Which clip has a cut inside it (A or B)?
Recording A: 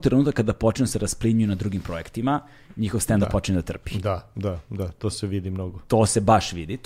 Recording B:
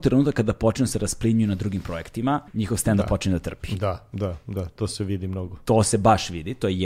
B